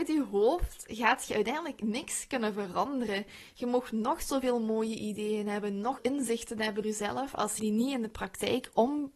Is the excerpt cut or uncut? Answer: cut